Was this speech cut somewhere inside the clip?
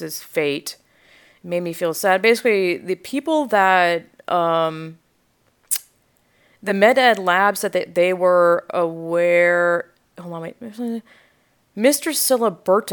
no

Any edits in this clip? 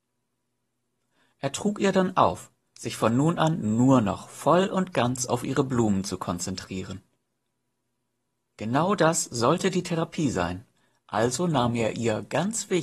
no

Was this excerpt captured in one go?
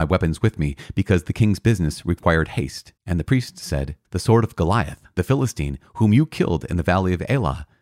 no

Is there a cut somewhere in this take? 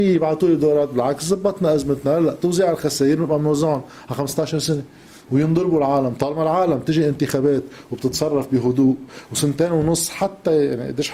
no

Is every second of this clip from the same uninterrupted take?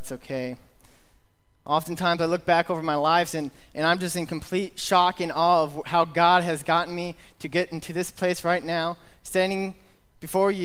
yes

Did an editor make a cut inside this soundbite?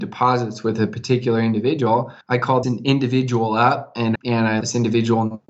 yes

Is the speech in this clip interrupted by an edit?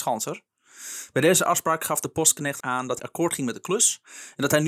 yes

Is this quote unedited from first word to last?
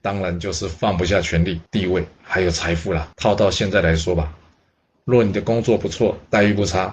no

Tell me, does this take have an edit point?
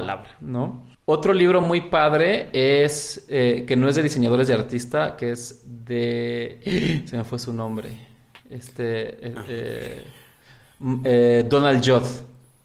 no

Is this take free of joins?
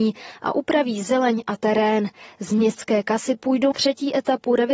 no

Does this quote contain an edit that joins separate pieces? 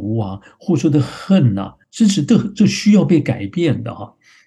yes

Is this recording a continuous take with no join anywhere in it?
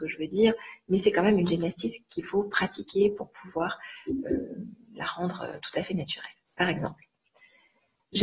yes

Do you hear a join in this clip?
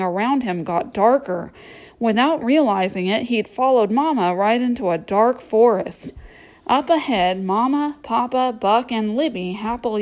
no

